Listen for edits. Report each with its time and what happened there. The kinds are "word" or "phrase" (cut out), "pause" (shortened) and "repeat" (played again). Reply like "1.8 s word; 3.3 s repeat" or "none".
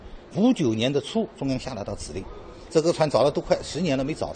2.7 s phrase